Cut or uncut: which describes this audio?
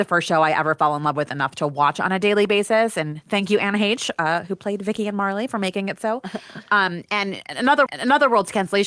cut